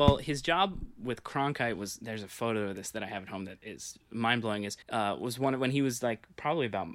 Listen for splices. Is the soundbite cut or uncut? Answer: cut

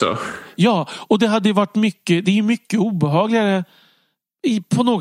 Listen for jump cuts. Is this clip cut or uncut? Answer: uncut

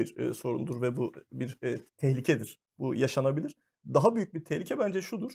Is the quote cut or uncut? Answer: cut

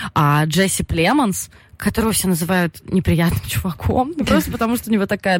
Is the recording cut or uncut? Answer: uncut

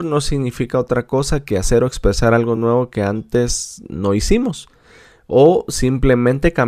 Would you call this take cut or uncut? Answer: uncut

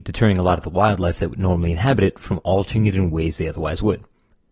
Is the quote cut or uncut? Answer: uncut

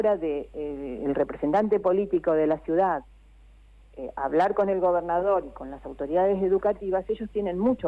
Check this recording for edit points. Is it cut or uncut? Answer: uncut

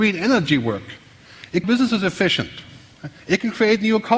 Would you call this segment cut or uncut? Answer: cut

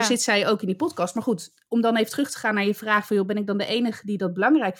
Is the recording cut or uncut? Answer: uncut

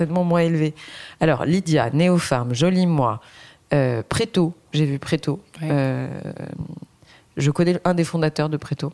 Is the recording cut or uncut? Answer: uncut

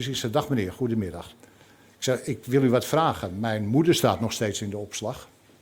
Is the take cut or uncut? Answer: uncut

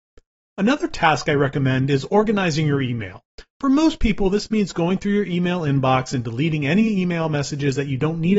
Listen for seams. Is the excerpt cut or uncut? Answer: uncut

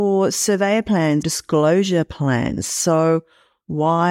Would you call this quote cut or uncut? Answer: cut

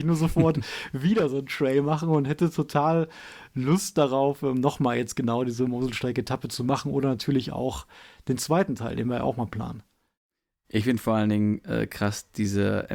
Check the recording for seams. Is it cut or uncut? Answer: uncut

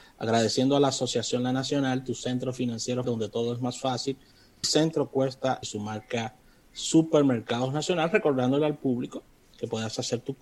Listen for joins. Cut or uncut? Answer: cut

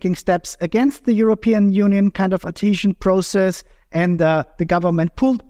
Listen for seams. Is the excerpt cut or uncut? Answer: uncut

